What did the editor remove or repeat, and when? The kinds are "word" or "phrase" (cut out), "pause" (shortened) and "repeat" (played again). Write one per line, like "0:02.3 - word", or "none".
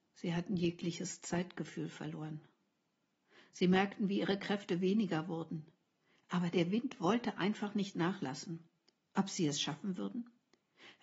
none